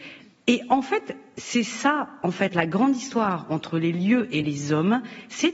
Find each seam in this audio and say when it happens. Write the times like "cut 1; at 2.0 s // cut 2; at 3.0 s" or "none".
none